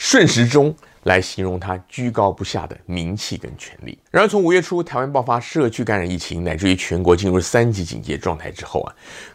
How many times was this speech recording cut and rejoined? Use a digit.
1